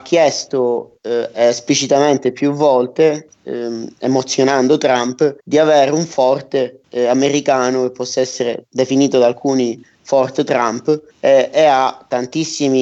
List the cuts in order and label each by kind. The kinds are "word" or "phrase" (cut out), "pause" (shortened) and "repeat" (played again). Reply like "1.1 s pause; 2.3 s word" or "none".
5.4 s pause; 11.1 s pause